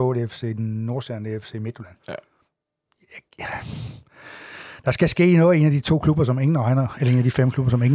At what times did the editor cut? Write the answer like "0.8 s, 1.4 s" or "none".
2.0 s